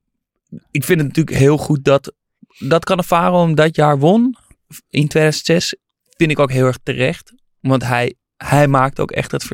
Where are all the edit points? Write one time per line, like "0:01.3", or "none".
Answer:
none